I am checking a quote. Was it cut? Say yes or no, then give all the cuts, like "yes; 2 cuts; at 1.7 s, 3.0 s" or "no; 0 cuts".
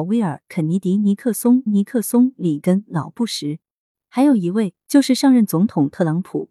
yes; 3 cuts; at 1.7 s, 3.8 s, 4.8 s